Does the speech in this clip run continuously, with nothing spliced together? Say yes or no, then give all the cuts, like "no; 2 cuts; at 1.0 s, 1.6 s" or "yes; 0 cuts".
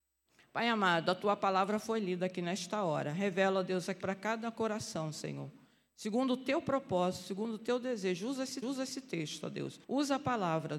no; 3 cuts; at 4.0 s, 8.6 s, 9.8 s